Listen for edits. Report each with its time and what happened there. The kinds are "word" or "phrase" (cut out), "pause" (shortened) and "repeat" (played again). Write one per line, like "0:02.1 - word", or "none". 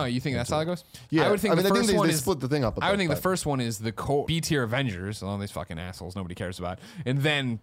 0:04.3 - word